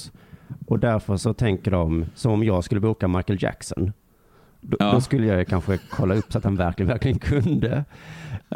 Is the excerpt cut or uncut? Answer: uncut